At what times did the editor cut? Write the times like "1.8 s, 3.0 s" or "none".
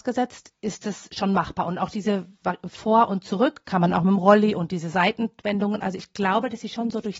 none

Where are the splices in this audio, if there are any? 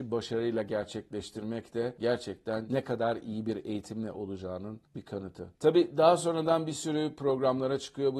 4.9 s

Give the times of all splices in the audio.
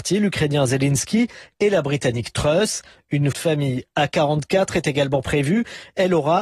3.3 s

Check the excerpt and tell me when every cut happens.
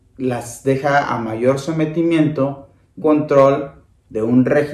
3.0 s

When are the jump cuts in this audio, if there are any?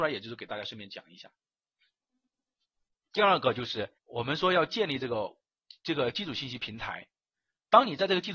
4.0 s

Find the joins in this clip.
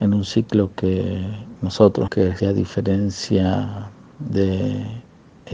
2.1 s, 2.4 s

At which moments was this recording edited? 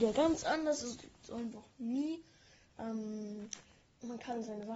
1.5 s

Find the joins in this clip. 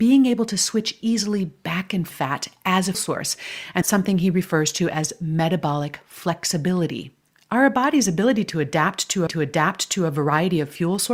2.1 s, 2.9 s, 3.8 s, 7.2 s, 9.3 s

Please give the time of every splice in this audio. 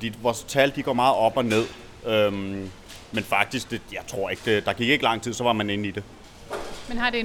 none

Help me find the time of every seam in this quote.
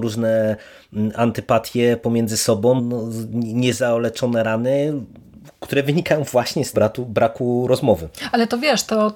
2.8 s, 6.7 s

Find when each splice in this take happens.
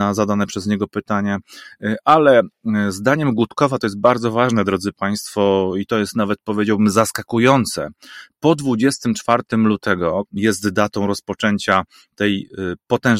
10.3 s

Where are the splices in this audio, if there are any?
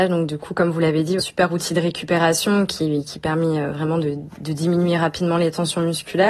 1.2 s

